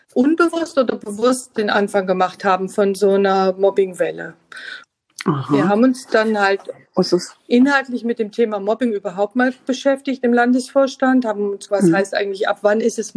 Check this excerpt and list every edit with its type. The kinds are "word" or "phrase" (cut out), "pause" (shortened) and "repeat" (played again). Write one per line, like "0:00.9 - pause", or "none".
0:11.7 - word